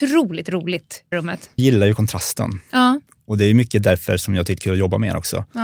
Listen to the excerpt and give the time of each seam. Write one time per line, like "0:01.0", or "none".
0:01.1
0:01.6
0:04.6